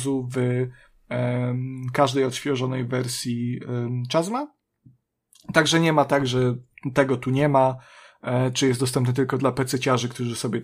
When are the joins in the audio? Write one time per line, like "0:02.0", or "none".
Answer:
none